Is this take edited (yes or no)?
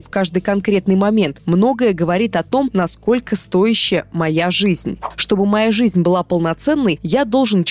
no